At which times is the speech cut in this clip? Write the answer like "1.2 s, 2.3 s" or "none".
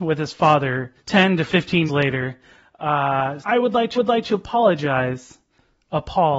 1.0 s, 1.9 s, 3.4 s, 4.0 s